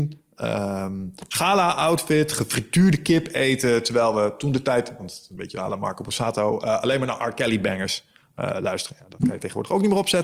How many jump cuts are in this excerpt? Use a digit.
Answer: 0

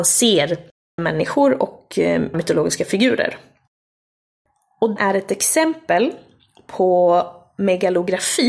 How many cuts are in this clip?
3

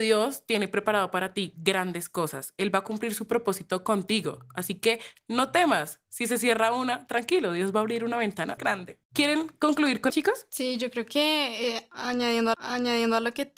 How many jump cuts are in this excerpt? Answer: 4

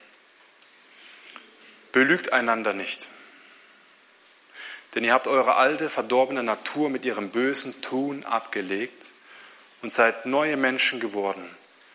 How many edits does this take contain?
0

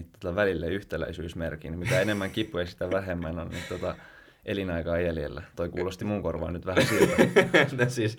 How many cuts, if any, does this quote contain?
0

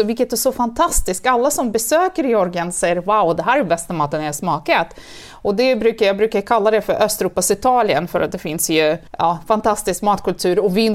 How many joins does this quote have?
1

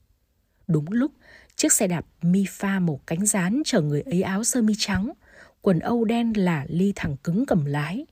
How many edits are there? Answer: 0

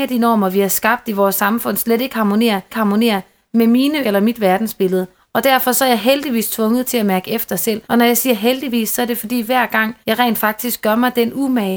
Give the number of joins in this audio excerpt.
5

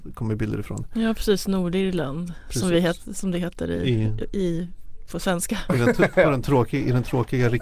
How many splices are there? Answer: 0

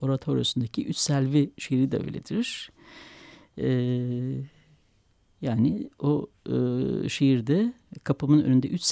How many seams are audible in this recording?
0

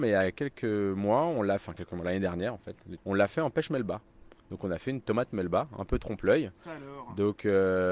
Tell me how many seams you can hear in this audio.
1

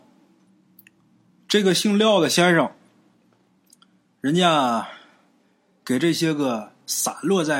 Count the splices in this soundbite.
0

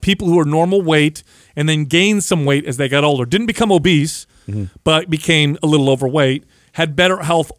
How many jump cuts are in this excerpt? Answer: 0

